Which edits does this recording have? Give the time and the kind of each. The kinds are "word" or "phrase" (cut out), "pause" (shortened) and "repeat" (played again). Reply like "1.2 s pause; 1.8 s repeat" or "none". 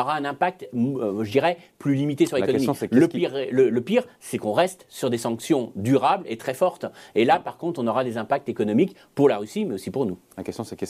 none